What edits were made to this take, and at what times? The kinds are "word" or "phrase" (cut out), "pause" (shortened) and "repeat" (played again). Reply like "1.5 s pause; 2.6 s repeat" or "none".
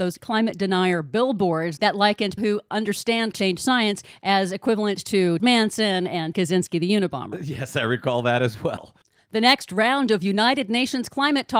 2.4 s word; 3.3 s word; 5.4 s word; 6.3 s word